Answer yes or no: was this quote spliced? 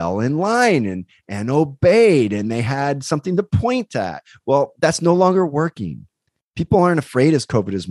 no